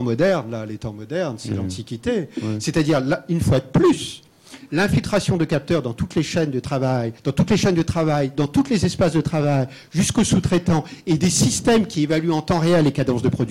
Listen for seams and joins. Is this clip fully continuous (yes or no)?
no